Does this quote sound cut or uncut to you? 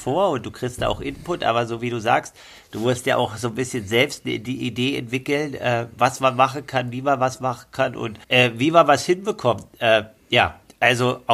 cut